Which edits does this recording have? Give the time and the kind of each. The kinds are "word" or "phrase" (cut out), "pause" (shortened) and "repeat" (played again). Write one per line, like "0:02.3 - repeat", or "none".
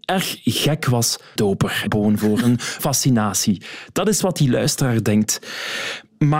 0:01.4 - phrase
0:01.9 - phrase
0:02.8 - word